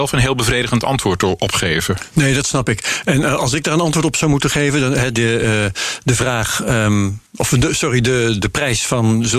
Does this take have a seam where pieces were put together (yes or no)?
yes